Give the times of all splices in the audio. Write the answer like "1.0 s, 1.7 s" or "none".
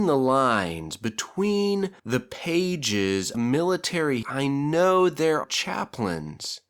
2.0 s, 3.3 s, 4.2 s, 5.4 s